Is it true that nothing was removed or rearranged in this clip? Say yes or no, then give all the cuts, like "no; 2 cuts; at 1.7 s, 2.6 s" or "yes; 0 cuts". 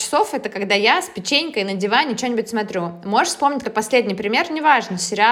no; 1 cut; at 3.6 s